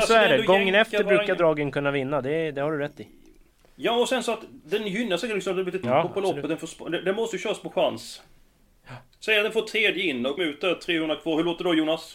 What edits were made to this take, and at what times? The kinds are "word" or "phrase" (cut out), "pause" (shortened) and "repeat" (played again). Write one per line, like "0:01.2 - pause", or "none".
0:05.8 - word
0:10.4 - word